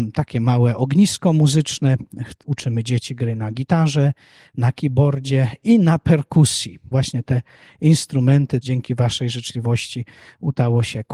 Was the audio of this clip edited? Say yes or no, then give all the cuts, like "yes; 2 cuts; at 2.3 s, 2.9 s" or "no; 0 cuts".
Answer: yes; 2 cuts; at 6.9 s, 8.6 s